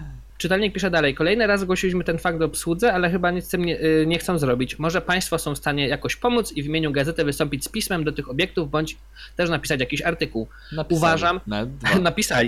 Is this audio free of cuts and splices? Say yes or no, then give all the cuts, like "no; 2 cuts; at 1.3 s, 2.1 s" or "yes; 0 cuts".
yes; 0 cuts